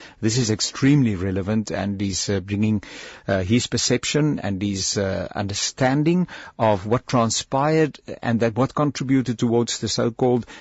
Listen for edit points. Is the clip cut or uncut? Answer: uncut